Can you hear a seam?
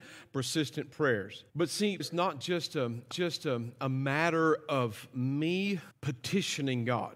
yes; 4 cuts; at 1.5 s, 2.0 s, 3.1 s, 5.9 s

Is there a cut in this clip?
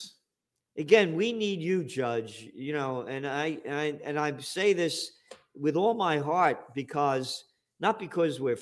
no; 0 cuts

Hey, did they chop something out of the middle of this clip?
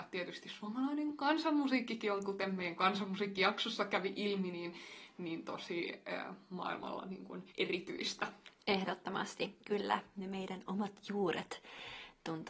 yes; 1 cut; at 7.5 s

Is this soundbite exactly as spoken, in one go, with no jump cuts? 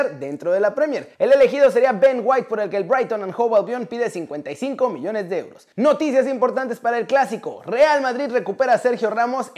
no; 2 cuts; at 1.1 s, 5.7 s

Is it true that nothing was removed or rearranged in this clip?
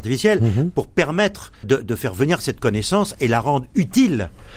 no; 1 cut; at 1.6 s

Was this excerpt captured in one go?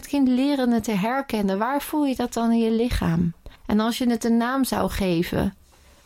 no; 1 cut; at 3.6 s

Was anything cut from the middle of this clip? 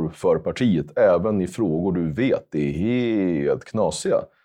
no; 0 cuts

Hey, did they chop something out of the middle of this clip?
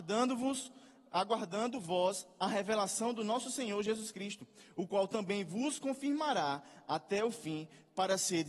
no; 0 cuts

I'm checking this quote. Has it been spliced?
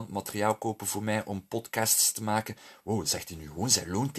no; 0 cuts

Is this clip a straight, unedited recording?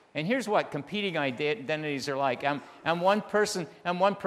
yes; 0 cuts

